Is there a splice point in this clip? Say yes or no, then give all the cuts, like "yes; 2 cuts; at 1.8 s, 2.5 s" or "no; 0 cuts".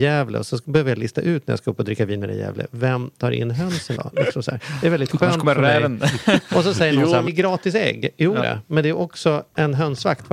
yes; 3 cuts; at 4.0 s, 7.3 s, 8.4 s